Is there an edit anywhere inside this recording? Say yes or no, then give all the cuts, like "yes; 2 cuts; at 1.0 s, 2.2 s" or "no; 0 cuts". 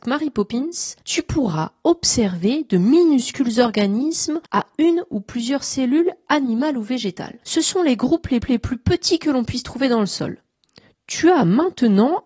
yes; 4 cuts; at 1.0 s, 4.5 s, 7.4 s, 8.4 s